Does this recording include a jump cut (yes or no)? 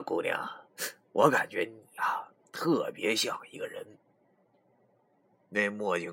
no